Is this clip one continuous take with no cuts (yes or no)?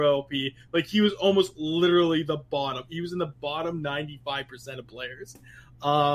yes